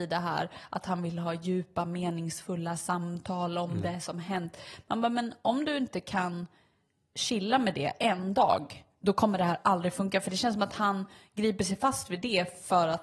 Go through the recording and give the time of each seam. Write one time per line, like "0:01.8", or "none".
none